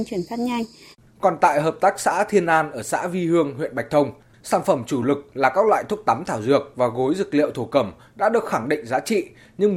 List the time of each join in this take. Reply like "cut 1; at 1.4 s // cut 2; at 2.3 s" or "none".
none